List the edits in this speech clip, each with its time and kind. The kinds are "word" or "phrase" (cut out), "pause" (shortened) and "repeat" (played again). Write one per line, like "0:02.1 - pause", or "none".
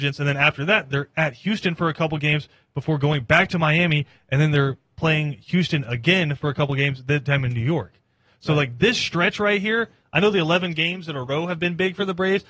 none